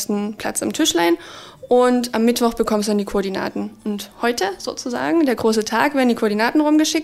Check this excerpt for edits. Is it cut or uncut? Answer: uncut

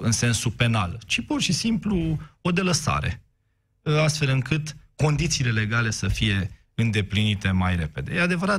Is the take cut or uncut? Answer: uncut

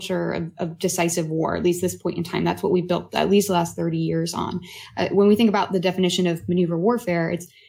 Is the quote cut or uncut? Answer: uncut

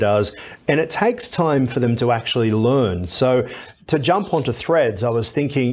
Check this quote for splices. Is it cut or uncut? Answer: uncut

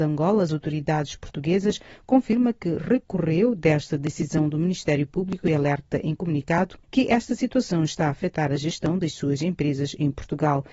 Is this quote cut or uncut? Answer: uncut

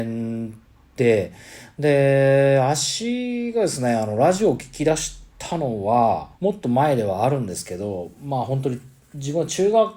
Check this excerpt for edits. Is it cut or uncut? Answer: cut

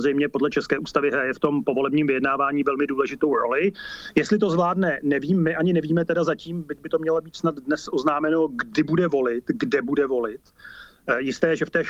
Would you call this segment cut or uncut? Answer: uncut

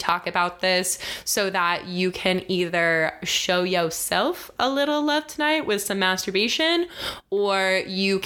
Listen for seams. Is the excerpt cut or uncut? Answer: uncut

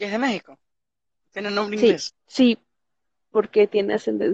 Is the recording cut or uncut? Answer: cut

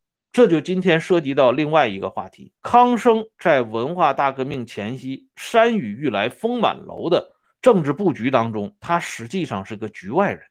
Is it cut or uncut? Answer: cut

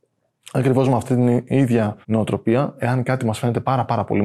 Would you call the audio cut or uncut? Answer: cut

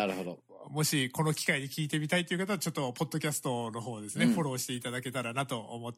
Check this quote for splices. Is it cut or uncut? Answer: uncut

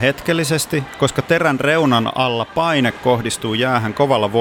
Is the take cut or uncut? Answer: uncut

